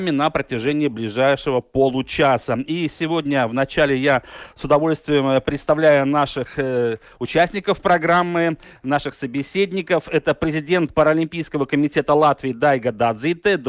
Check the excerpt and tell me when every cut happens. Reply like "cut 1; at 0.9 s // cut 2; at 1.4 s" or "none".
none